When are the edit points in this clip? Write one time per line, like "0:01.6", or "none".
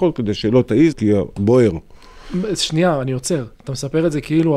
0:00.9
0:01.4
0:03.5